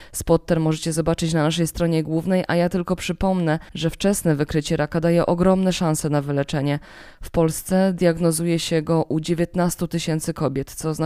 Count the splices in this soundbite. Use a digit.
1